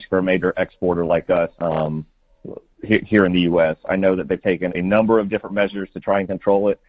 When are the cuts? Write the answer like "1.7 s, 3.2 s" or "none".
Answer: 1.5 s, 4.7 s